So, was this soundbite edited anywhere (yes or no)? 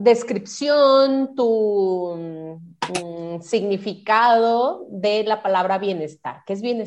no